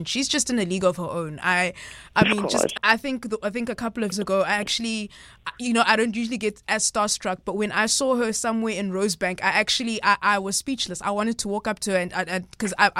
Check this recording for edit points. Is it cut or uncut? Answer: cut